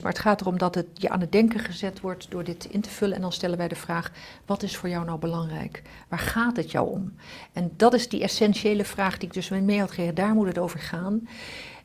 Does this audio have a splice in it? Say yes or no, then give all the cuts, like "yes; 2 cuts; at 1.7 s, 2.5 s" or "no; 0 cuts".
no; 0 cuts